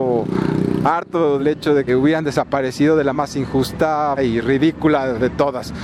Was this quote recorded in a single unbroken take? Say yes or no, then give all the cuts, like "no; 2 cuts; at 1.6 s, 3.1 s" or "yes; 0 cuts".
no; 4 cuts; at 1.4 s, 1.9 s, 3.1 s, 4.2 s